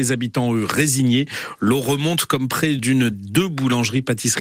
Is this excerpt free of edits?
no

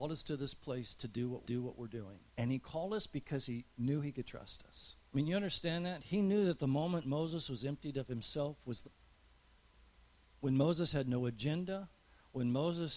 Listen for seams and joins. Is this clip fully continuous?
no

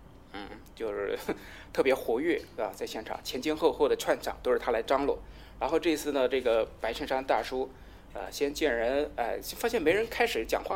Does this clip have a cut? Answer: no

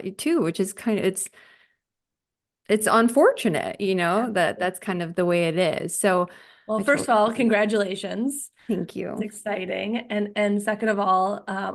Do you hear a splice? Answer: no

